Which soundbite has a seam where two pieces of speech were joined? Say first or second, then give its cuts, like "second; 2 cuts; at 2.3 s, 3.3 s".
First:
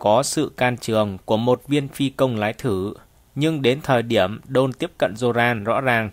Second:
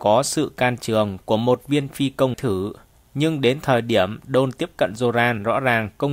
second; 1 cut; at 2.3 s